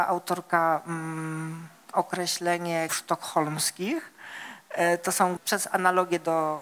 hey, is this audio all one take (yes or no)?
no